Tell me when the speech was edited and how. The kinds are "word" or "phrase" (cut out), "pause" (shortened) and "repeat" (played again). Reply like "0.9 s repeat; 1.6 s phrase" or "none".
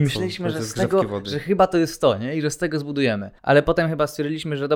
3.4 s pause